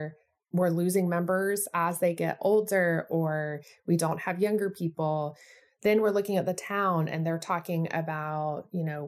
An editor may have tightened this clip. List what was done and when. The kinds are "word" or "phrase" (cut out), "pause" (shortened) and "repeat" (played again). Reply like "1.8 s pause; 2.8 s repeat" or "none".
none